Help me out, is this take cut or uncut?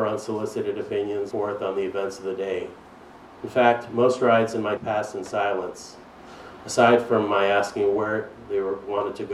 cut